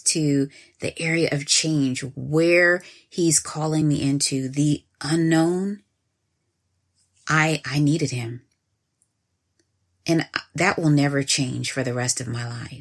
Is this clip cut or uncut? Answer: uncut